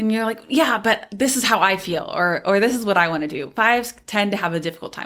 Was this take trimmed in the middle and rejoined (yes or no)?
no